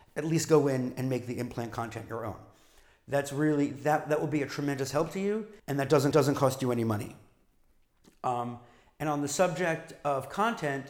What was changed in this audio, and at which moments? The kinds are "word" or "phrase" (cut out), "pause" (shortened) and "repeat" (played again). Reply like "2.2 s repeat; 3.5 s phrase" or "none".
5.6 s pause; 6.1 s repeat